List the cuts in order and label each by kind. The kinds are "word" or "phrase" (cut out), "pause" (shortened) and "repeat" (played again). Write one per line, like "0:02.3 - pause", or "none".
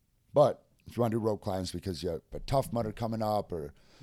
0:02.3 - word